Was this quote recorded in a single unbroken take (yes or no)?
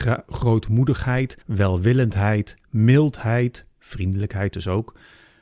no